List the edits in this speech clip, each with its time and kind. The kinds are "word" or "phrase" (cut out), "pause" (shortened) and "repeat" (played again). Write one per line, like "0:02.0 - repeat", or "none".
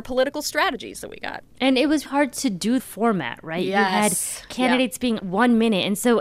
0:02.1 - word
0:02.8 - phrase
0:05.2 - word